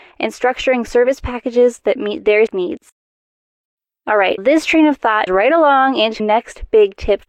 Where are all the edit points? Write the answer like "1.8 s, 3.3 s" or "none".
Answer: 2.5 s, 4.4 s, 5.3 s, 6.2 s